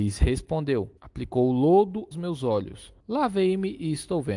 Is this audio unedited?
no; 3 cuts; at 1.0 s, 2.1 s, 3.0 s

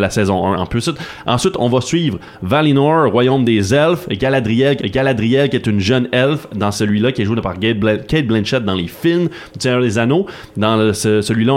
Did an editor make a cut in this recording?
yes; 1 cut; at 4.8 s

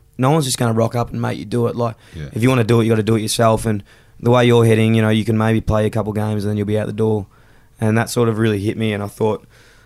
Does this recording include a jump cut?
no; 0 cuts

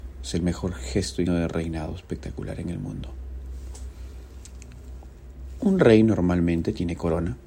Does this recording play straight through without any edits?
no; 1 cut; at 1.3 s

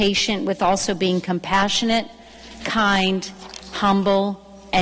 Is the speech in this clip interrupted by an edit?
no; 0 cuts

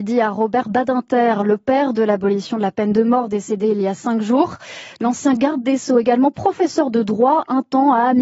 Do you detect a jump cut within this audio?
no; 0 cuts

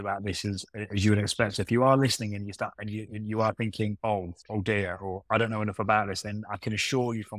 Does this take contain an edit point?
yes; 1 cut; at 4.0 s

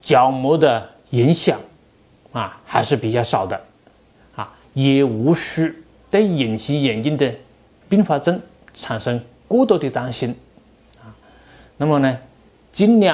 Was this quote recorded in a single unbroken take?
yes; 0 cuts

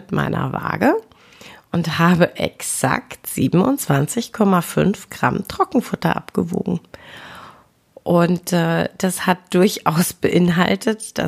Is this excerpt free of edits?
yes; 0 cuts

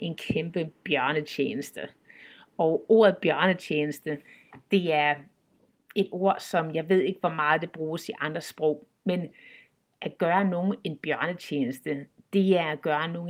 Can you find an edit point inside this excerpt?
no; 0 cuts

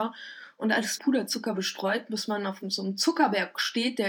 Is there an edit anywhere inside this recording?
yes; 1 cut; at 1.0 s

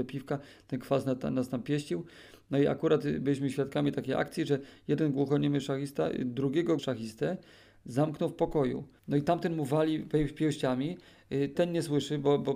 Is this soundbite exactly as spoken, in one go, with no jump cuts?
no; 3 cuts; at 6.8 s, 9.0 s, 11.6 s

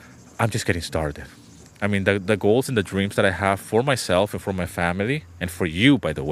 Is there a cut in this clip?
no; 0 cuts

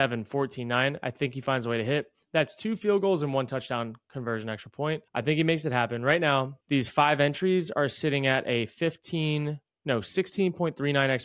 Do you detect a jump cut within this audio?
yes; 2 cuts; at 5.1 s, 6.6 s

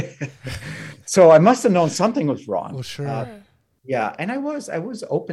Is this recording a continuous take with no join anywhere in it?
yes; 0 cuts

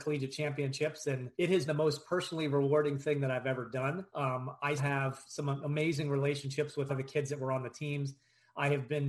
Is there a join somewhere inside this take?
yes; 5 cuts; at 1.3 s, 1.7 s, 4.1 s, 4.8 s, 6.9 s

